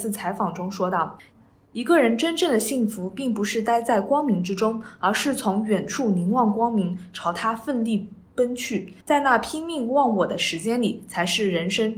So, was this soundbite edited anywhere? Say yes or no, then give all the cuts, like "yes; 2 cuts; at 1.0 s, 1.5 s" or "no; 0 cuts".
yes; 1 cut; at 9.0 s